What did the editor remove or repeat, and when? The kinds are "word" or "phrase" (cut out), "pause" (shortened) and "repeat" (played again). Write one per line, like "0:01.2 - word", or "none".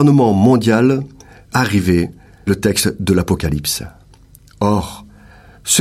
0:01.5 - word
0:02.5 - word